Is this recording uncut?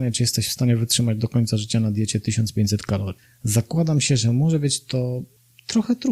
yes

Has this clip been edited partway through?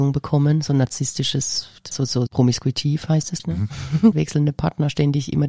yes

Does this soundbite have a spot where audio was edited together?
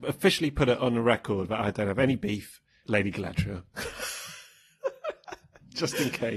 yes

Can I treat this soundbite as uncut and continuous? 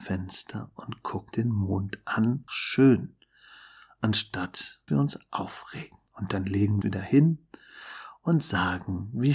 no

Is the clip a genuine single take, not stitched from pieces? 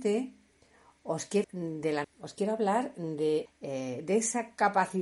no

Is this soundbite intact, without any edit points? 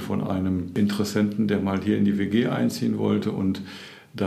yes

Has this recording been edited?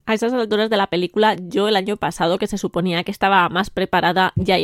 no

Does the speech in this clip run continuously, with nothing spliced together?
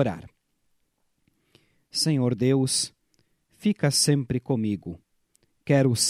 yes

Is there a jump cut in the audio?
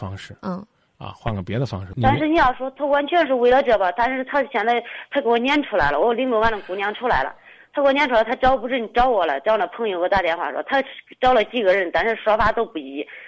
no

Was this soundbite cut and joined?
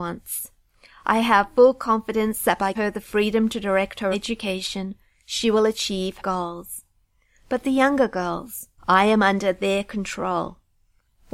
yes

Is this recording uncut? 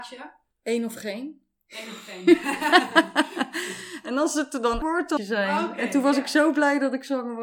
no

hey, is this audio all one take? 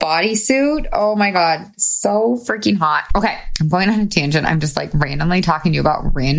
yes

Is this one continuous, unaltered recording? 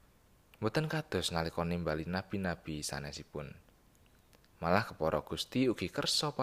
yes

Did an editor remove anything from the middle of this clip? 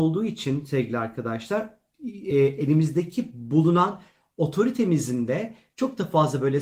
no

